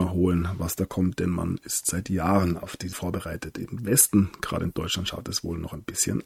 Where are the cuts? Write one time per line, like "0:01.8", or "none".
0:02.9